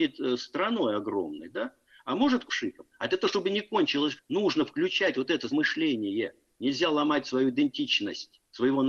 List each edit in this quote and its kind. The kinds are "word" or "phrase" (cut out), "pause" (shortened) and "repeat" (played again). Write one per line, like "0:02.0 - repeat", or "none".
0:02.5 - word
0:04.2 - word
0:05.5 - word